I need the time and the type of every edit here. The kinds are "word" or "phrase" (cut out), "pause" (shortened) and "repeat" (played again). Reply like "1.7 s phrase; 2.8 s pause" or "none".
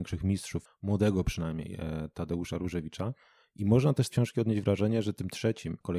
4.1 s word